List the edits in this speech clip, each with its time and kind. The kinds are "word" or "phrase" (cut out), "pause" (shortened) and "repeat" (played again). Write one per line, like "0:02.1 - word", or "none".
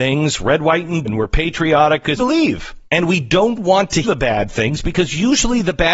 0:01.1 - word
0:02.2 - word
0:02.9 - pause
0:04.0 - word